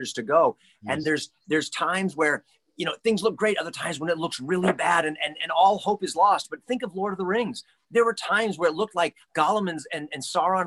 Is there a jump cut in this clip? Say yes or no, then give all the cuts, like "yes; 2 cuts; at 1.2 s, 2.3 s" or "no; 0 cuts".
no; 0 cuts